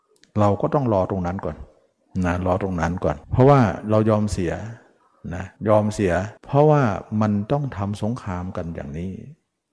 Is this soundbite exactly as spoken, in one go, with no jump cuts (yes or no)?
no